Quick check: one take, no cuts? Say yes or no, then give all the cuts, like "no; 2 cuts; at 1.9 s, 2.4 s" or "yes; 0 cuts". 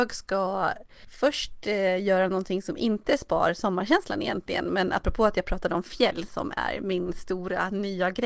yes; 0 cuts